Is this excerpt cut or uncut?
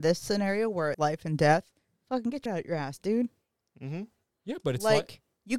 cut